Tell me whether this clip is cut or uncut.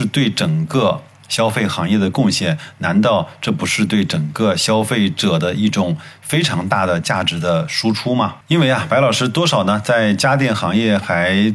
uncut